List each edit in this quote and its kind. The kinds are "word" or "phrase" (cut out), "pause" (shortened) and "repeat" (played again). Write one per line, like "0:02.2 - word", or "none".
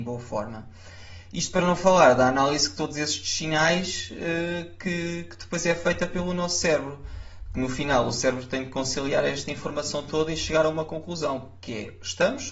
none